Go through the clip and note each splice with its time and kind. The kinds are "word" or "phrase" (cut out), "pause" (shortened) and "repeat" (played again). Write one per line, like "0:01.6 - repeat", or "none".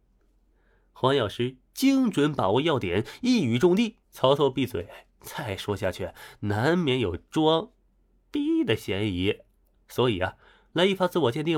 0:04.0 - pause